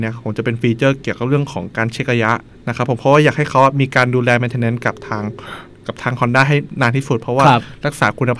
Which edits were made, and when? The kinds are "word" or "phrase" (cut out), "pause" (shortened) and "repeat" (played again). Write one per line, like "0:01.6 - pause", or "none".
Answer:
0:02.5 - pause